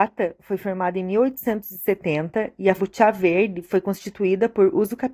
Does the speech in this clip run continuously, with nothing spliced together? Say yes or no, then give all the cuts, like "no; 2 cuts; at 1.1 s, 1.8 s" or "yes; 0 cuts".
no; 1 cut; at 2.8 s